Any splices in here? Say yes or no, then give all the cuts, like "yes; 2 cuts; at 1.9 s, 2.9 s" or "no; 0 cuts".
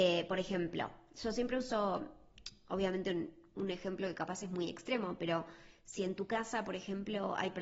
no; 0 cuts